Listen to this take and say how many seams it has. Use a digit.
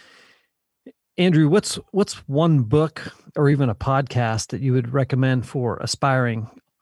0